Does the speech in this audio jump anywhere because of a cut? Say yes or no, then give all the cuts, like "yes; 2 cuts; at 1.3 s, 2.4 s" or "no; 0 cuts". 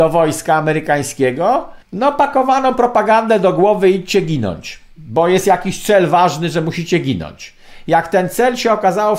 yes; 1 cut; at 1.8 s